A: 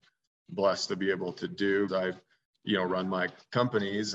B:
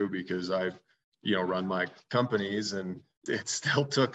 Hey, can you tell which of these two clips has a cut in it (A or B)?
A